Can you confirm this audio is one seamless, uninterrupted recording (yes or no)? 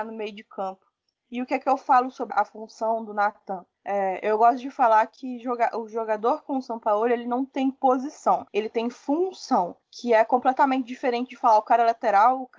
no